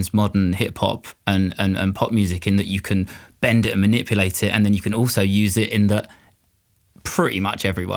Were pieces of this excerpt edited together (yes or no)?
no